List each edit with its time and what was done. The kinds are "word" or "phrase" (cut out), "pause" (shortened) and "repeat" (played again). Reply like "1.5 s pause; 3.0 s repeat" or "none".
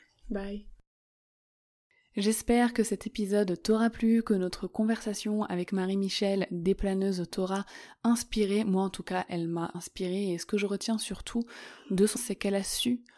9.7 s word; 12.2 s word